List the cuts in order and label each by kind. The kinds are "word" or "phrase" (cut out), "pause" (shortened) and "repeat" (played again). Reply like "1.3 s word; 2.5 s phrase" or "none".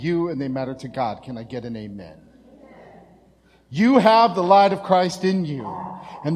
none